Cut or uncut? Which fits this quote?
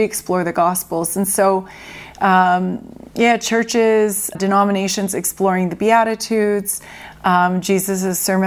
cut